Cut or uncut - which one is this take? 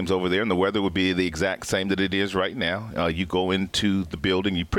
uncut